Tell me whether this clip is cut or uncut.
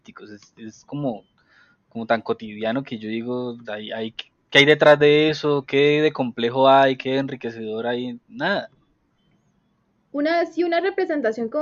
cut